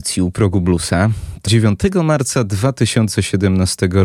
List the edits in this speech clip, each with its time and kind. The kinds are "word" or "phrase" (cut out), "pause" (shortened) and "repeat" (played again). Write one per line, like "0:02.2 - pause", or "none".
0:01.5 - word

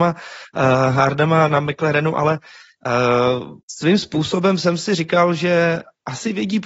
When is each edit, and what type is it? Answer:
0:03.6 - pause

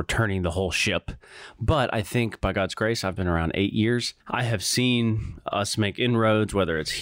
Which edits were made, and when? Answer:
0:04.2 - pause

